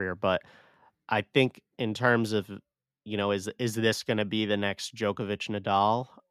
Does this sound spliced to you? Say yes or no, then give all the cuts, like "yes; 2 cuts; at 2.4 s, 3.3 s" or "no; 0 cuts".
no; 0 cuts